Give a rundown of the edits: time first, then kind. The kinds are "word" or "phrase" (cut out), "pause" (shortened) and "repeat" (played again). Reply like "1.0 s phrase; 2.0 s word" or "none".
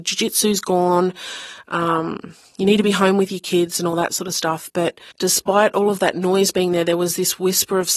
5.1 s pause